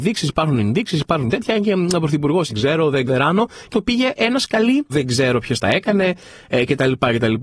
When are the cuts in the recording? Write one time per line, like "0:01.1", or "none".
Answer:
0:02.5
0:03.1
0:03.7
0:04.9